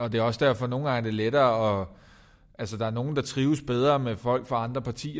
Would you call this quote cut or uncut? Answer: uncut